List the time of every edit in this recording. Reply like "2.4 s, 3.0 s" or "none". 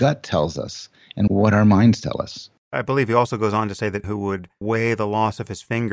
1.3 s, 4.0 s